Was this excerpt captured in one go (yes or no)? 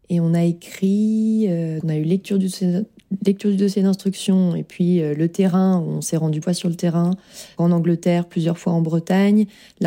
no